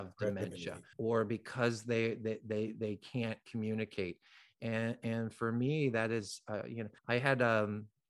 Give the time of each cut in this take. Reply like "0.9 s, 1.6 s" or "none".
0.9 s, 7.0 s

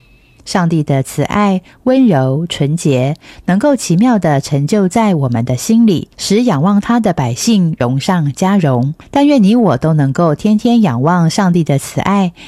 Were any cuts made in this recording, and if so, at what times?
6.1 s, 9.0 s

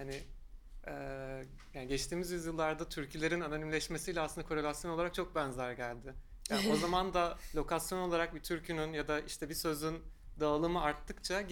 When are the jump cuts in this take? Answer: none

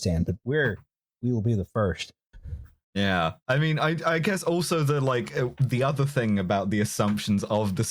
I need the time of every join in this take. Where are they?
none

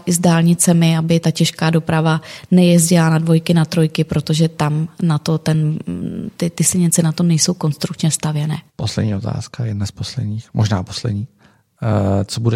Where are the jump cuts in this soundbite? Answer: 8.7 s

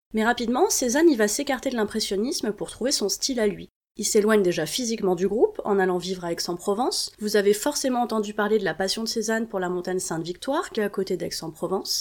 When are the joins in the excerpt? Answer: 10.8 s

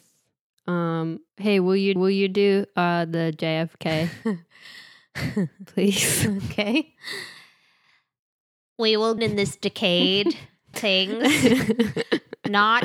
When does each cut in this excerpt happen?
1.3 s, 2.0 s, 9.2 s, 10.7 s

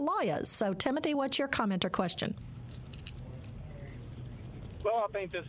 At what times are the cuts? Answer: none

